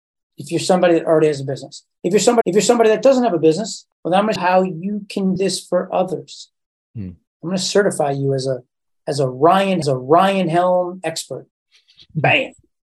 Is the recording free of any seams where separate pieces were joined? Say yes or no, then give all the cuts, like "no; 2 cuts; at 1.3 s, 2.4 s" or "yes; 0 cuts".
no; 7 cuts; at 2.4 s, 3.9 s, 4.4 s, 5.4 s, 7.3 s, 9.8 s, 11.5 s